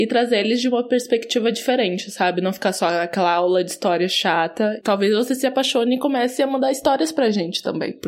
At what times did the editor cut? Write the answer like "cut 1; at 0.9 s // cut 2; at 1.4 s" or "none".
cut 1; at 4.8 s